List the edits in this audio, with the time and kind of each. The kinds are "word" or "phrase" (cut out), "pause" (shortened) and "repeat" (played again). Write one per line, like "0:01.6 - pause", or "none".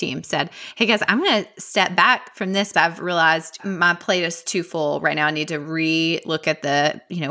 0:02.7 - word